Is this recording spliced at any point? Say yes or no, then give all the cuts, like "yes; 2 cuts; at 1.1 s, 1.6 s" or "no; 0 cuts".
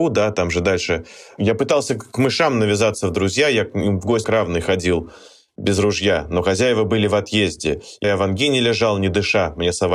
yes; 2 cuts; at 4.2 s, 8.0 s